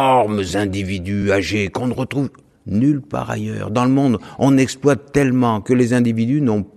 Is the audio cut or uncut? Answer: uncut